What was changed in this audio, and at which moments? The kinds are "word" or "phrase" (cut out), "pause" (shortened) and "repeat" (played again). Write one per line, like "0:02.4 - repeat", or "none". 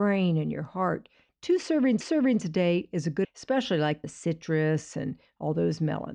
0:02.0 - repeat
0:03.2 - phrase
0:04.0 - phrase